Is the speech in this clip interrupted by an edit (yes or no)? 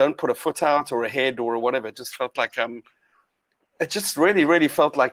no